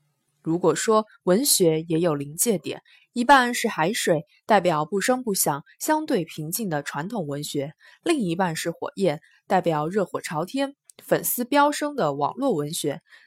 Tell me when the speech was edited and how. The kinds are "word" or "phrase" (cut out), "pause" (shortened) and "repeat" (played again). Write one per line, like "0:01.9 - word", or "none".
none